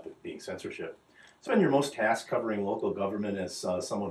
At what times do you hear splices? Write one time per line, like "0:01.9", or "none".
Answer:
0:01.5
0:01.9